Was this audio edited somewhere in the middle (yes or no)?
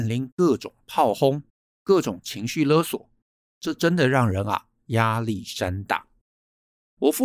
no